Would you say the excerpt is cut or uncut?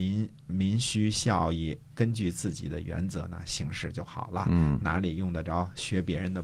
cut